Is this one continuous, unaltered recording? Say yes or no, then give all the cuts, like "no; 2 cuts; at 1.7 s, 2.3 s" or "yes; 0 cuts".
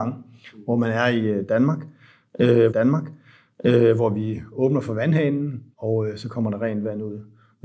no; 2 cuts; at 2.7 s, 5.7 s